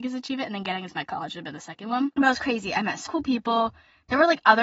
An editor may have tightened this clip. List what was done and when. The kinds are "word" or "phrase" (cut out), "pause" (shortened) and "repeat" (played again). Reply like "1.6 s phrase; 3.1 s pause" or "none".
3.1 s word